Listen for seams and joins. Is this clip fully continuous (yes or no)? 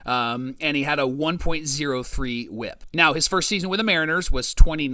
yes